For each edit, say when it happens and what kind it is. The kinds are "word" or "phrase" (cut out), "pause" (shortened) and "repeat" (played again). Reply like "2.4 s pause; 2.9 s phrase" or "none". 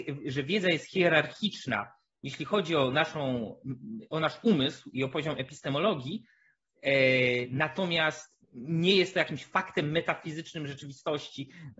8.4 s pause